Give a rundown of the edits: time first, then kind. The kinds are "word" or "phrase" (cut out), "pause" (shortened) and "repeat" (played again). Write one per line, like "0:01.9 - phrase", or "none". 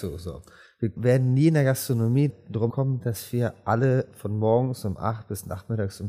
0:01.0 - word
0:02.3 - word
0:02.7 - word